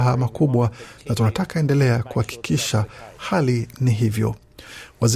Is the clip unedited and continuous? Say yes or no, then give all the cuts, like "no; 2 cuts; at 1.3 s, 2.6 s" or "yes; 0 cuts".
yes; 0 cuts